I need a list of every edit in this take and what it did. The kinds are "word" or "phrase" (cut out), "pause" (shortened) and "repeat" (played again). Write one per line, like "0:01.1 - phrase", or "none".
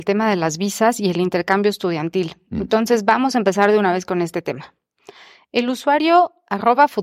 none